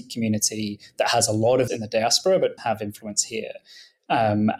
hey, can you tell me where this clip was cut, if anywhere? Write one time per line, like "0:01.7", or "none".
0:01.7
0:02.6